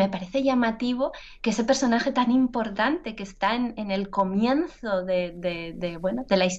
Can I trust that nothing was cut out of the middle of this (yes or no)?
yes